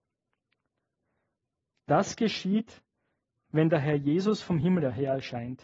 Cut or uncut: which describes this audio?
uncut